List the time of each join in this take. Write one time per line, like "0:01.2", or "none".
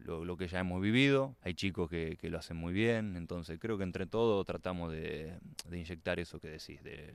0:01.4